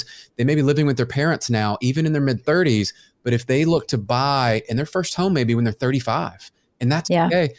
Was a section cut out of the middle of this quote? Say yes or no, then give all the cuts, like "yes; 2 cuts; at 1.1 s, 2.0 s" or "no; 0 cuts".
no; 0 cuts